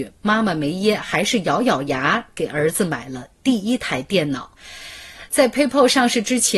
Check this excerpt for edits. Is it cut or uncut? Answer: uncut